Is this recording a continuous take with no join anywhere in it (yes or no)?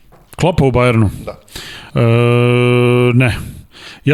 no